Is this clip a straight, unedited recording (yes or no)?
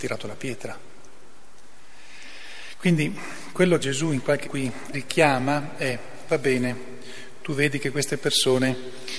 no